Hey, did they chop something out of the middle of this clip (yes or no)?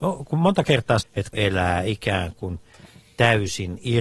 yes